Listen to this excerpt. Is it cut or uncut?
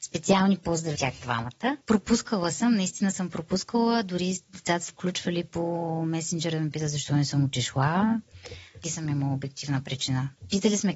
cut